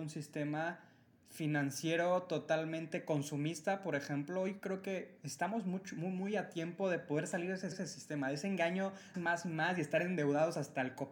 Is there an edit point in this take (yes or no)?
yes